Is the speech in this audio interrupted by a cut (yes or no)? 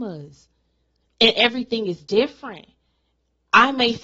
no